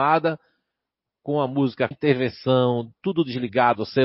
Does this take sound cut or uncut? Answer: cut